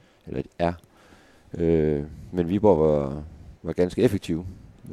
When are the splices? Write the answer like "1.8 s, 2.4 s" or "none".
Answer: 3.6 s